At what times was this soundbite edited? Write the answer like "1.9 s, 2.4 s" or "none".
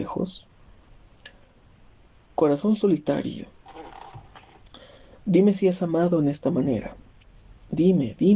none